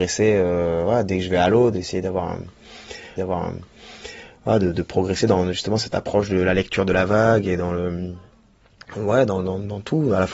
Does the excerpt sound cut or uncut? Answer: cut